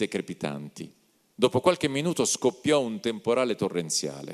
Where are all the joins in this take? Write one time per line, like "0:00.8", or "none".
none